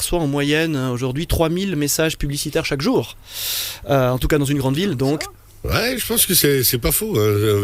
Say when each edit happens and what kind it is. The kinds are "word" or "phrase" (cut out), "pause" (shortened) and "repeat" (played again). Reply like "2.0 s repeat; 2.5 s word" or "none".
none